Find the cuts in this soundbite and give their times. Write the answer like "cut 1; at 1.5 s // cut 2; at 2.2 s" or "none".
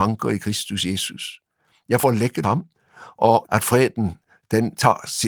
cut 1; at 2.0 s // cut 2; at 2.4 s // cut 3; at 3.4 s